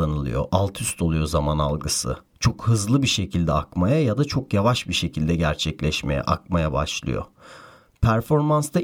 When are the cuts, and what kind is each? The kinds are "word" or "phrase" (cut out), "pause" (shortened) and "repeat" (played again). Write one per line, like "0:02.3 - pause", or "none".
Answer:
none